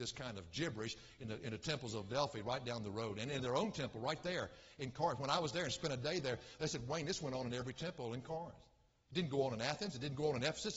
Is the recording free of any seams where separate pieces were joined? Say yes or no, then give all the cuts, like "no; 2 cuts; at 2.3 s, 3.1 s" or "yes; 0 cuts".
no; 1 cut; at 3.4 s